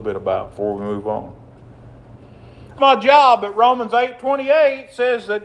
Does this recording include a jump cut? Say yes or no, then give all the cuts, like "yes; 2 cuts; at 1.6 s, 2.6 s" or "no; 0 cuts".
yes; 1 cut; at 2.8 s